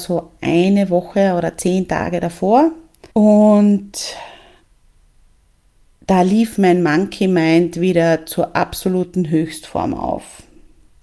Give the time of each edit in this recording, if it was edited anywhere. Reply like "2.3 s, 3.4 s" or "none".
3.1 s